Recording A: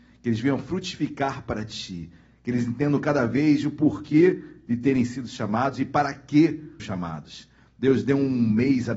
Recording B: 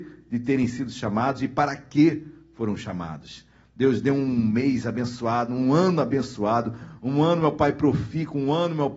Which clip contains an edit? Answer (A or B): A